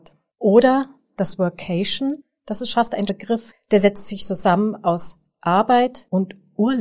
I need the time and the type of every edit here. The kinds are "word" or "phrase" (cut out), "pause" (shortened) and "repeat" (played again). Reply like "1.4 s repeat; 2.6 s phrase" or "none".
2.7 s word; 3.1 s word